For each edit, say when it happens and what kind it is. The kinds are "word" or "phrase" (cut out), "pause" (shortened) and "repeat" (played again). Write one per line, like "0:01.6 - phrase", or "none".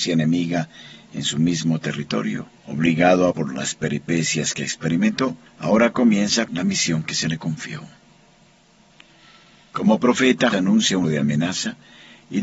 0:02.6 - pause
0:03.3 - word
0:05.5 - pause
0:06.5 - word
0:10.5 - word
0:11.0 - word